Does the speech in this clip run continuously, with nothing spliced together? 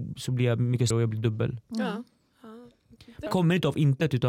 no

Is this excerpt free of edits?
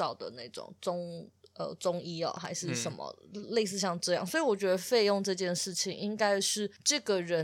yes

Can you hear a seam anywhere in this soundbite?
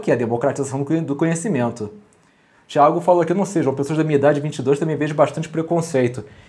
no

